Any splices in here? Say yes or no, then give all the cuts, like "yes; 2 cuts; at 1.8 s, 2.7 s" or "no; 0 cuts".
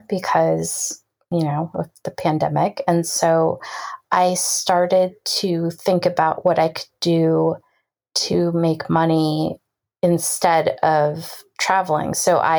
no; 0 cuts